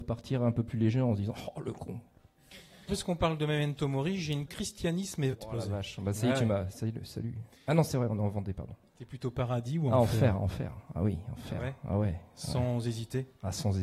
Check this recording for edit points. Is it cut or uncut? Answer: cut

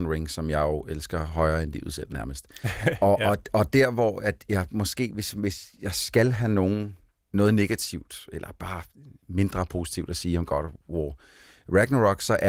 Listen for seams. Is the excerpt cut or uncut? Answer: uncut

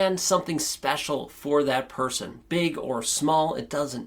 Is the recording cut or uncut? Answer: uncut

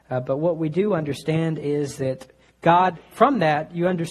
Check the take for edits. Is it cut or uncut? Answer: uncut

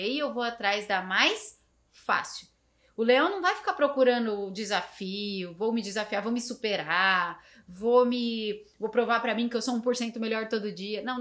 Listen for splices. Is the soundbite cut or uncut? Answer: uncut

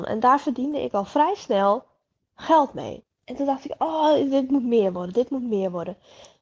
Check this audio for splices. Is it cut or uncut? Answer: uncut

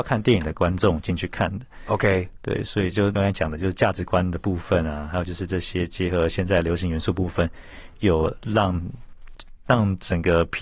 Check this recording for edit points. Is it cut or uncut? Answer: uncut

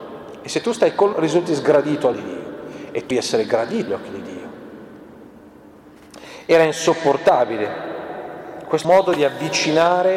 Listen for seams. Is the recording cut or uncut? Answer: cut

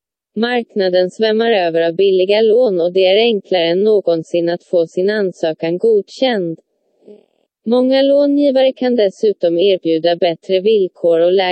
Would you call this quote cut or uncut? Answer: uncut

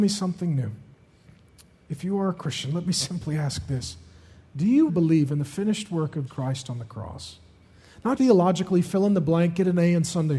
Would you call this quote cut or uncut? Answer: cut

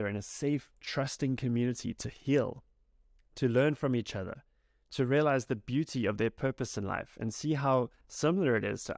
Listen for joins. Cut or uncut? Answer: uncut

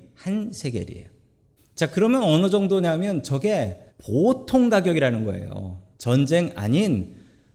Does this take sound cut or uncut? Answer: cut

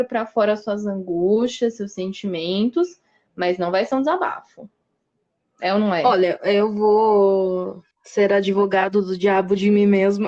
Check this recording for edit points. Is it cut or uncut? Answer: cut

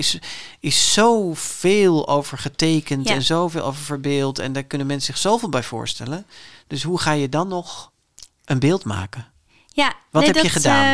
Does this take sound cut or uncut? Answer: uncut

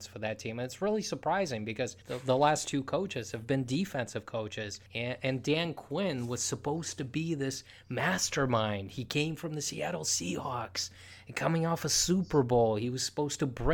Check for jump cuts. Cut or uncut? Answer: cut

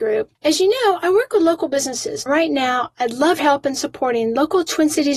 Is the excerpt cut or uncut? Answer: cut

